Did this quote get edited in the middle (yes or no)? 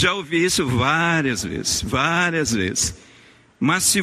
no